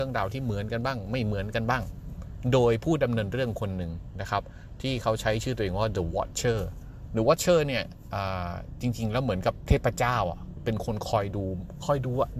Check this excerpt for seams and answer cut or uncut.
uncut